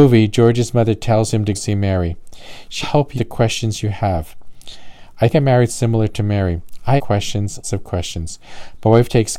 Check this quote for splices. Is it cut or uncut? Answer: cut